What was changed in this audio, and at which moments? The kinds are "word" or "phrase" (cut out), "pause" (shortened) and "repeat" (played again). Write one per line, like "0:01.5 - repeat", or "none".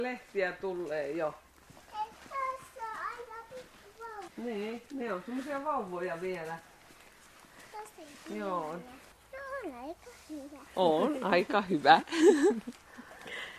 0:04.3 - pause
0:10.7 - pause